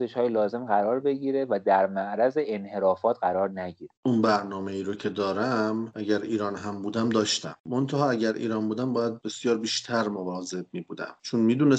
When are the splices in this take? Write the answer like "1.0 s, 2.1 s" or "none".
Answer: 4.0 s

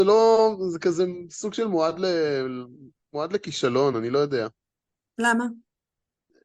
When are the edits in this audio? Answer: none

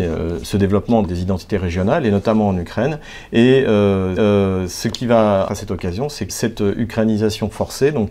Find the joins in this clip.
1.0 s, 4.2 s, 5.5 s, 6.3 s

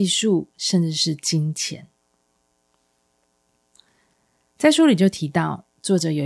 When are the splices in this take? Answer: none

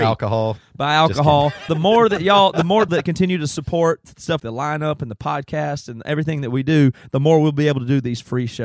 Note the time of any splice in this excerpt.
1.7 s, 2.9 s, 4.4 s

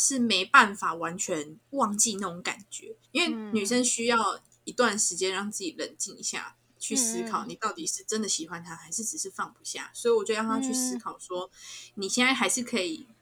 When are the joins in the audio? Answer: 3.0 s

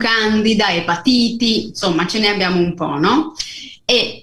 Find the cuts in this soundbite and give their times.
none

